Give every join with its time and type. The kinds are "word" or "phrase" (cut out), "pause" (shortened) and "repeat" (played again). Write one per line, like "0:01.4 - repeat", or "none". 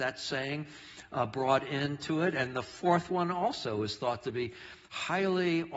none